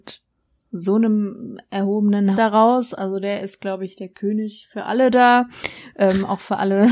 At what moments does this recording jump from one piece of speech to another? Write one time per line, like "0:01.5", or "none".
0:02.3